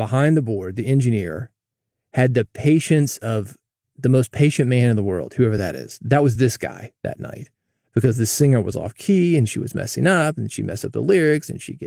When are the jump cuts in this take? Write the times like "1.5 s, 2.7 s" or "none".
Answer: none